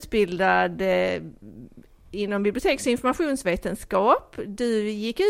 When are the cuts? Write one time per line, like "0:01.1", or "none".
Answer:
none